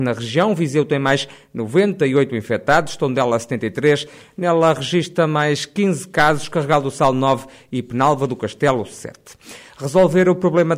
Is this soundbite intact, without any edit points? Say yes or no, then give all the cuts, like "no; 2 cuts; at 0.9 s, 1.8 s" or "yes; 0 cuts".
yes; 0 cuts